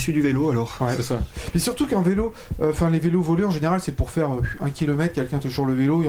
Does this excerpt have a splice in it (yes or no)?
no